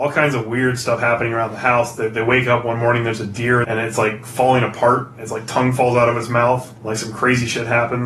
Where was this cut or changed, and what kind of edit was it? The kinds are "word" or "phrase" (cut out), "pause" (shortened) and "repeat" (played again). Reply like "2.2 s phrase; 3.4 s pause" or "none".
3.6 s phrase